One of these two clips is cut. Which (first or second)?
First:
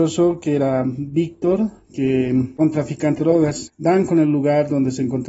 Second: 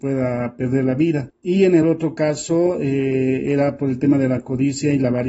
first